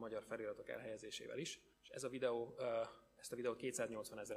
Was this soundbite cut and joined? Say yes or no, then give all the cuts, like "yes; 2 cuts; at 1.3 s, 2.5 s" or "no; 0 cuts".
yes; 1 cut; at 1.7 s